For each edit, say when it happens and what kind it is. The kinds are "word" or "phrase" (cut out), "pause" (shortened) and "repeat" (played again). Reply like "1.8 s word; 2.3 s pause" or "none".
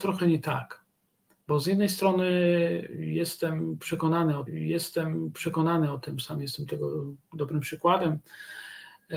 4.5 s repeat; 7.2 s pause